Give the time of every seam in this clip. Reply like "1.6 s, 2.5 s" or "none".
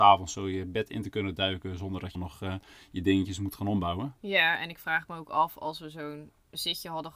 2.1 s